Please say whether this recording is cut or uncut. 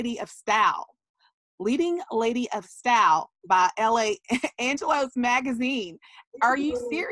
uncut